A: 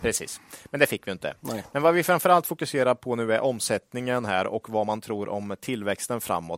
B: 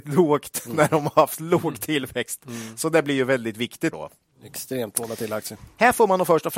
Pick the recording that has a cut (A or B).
B